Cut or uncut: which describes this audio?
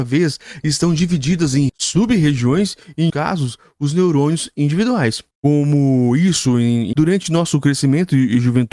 cut